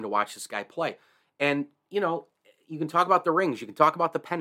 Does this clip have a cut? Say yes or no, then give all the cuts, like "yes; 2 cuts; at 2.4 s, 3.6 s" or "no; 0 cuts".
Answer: no; 0 cuts